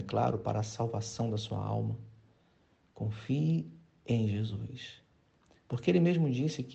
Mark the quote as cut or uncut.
uncut